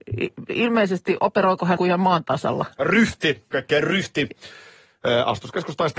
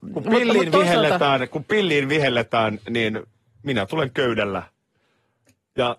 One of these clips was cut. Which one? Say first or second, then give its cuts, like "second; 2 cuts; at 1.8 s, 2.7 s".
first; 2 cuts; at 1.8 s, 3.5 s